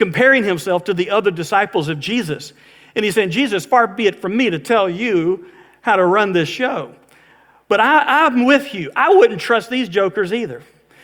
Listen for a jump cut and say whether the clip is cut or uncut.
uncut